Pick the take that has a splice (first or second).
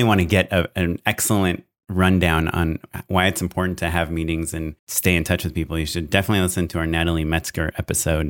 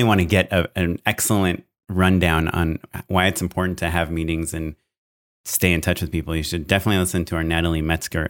first